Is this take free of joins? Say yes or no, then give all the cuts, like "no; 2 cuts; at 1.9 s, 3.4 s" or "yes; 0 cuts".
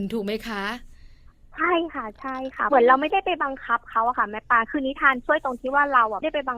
yes; 0 cuts